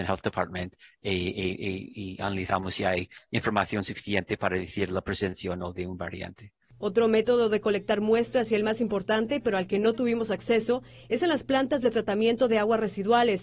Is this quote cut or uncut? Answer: uncut